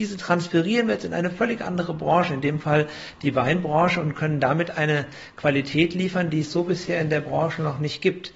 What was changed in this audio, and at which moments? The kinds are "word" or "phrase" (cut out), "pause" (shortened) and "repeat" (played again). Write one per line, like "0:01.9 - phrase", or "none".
none